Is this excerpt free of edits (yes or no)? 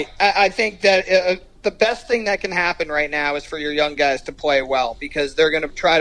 yes